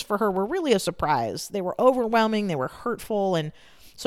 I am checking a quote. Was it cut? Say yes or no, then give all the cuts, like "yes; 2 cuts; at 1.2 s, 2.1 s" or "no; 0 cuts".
no; 0 cuts